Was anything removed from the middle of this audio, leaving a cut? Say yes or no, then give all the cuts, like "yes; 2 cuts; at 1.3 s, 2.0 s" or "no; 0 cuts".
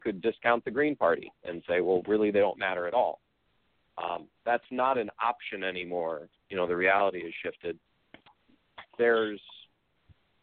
no; 0 cuts